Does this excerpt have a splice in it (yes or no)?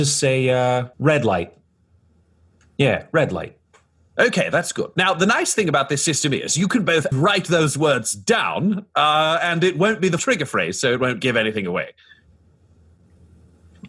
yes